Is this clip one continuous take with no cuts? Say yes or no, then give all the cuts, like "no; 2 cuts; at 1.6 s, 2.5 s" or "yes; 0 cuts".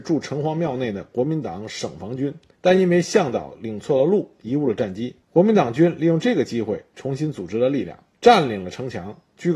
no; 3 cuts; at 2.5 s, 5.2 s, 8.1 s